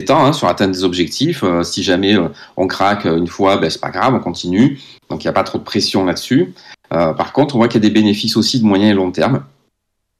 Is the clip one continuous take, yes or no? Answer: yes